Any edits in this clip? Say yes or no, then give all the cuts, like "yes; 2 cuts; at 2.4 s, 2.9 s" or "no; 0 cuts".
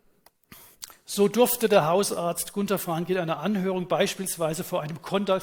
no; 0 cuts